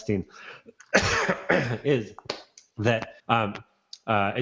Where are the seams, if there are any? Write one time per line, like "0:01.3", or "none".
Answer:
0:03.2